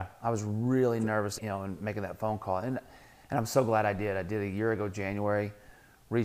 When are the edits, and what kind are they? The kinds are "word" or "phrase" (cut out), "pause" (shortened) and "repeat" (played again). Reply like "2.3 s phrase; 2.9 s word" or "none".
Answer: 1.4 s word

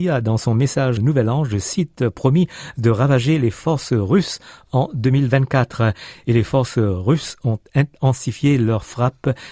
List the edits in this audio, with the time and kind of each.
1.0 s word

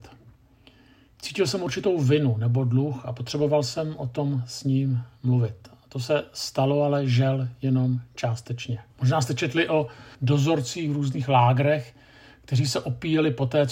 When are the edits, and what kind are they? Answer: 8.9 s pause; 10.1 s pause

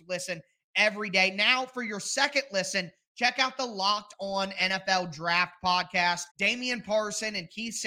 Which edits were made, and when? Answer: 6.3 s pause

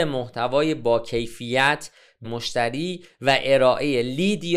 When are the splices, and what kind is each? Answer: 2.2 s phrase

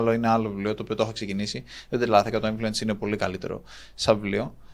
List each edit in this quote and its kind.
none

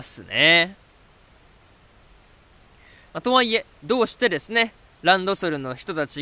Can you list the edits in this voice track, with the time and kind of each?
none

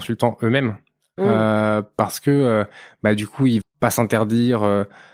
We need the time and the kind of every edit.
3.6 s word

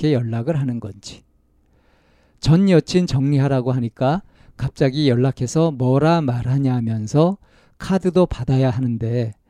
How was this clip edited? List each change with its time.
none

